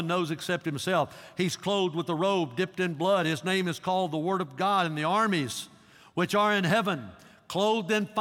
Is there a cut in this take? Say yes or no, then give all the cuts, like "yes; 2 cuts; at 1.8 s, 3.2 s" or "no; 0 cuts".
no; 0 cuts